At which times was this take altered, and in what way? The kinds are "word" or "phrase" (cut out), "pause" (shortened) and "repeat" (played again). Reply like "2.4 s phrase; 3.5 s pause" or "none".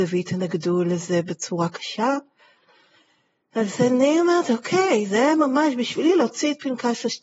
none